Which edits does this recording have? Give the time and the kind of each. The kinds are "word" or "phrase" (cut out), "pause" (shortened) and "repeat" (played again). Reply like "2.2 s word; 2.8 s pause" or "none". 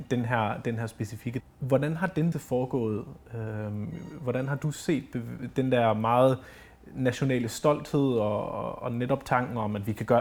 1.4 s word; 2.3 s word